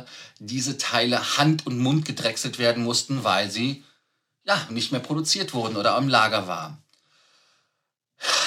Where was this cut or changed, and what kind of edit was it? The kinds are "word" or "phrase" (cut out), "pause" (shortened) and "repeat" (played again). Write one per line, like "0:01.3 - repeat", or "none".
none